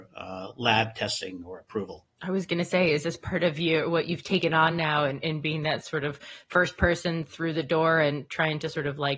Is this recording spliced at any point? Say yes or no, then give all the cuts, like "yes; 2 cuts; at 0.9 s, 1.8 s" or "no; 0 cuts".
no; 0 cuts